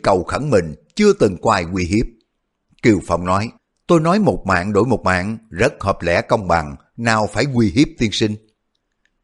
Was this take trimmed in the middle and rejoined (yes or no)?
yes